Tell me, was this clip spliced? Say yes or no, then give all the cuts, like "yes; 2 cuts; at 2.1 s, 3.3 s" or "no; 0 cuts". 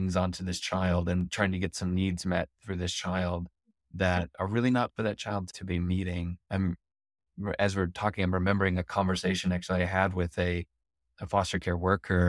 no; 0 cuts